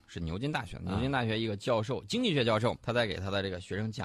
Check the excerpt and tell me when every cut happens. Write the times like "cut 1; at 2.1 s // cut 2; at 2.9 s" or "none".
cut 1; at 2.8 s